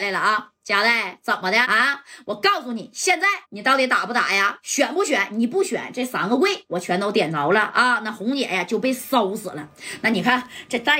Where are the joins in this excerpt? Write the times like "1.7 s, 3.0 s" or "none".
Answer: 1.6 s, 3.4 s